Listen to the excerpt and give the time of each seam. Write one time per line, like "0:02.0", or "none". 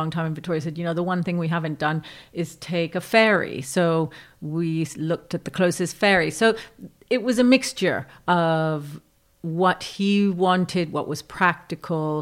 none